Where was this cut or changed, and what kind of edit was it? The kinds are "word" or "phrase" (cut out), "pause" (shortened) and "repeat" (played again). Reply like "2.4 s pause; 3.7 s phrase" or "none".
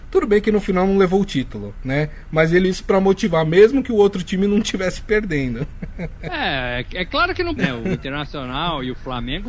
2.6 s word; 7.6 s word